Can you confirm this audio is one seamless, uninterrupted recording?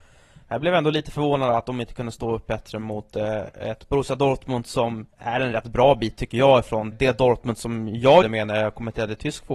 no; 3 cuts; at 5.1 s, 6.9 s, 8.2 s

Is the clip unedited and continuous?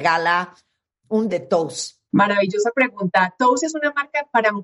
no; 2 cuts; at 1.3 s, 2.1 s

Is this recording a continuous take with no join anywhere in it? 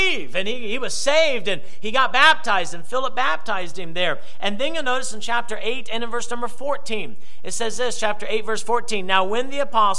yes; 0 cuts

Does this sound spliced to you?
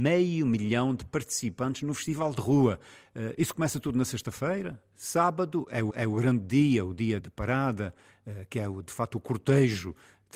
yes; 2 cuts; at 5.9 s, 7.2 s

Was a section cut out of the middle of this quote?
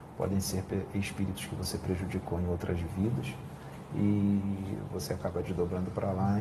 no; 0 cuts

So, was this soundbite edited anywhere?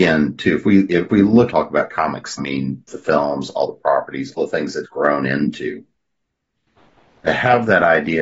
yes; 6 cuts; at 1.1 s, 1.5 s, 2.4 s, 2.9 s, 4.4 s, 4.8 s

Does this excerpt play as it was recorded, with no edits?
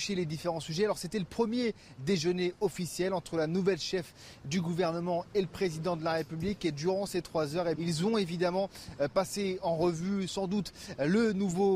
no; 1 cut; at 7.8 s

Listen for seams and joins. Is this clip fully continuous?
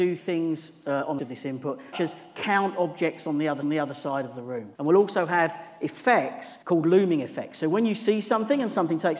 no; 5 cuts; at 1.2 s, 1.9 s, 3.6 s, 4.7 s, 6.6 s

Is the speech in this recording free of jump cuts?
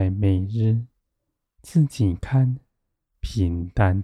yes; 0 cuts

